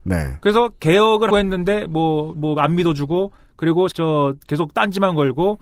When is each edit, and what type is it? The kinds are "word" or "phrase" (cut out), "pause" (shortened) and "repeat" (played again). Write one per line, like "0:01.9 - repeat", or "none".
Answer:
0:01.3 - word
0:02.3 - word
0:03.9 - word